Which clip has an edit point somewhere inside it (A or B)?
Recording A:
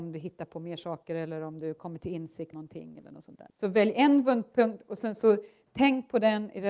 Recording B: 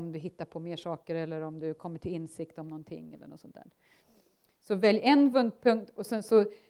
A